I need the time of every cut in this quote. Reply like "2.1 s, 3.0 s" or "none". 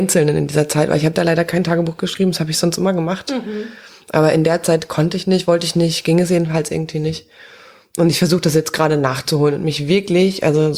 none